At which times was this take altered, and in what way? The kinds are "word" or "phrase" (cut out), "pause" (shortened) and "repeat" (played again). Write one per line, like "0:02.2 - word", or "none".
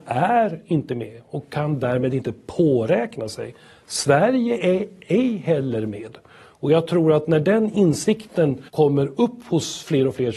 0:08.7 - pause